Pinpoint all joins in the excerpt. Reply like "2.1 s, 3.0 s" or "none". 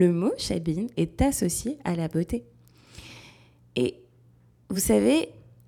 none